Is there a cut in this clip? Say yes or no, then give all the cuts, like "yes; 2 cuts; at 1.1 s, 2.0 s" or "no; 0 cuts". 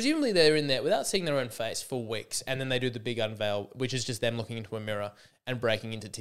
no; 0 cuts